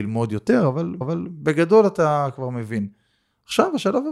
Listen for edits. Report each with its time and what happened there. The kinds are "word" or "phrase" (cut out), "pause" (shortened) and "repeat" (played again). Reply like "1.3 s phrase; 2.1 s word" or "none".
1.0 s repeat